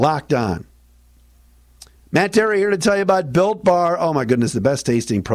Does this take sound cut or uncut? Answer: cut